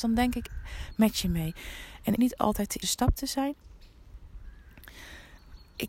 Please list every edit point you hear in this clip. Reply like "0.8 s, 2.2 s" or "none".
2.2 s, 2.8 s